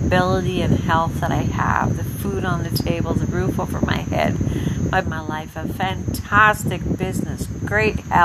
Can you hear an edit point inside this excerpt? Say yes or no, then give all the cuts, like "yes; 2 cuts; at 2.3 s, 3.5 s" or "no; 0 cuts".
yes; 1 cut; at 5.0 s